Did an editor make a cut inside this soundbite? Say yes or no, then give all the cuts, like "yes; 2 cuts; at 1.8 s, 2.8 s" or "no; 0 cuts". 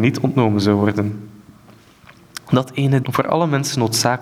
yes; 1 cut; at 3.0 s